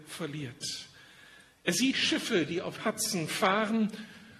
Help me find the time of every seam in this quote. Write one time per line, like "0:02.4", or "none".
0:01.9
0:02.8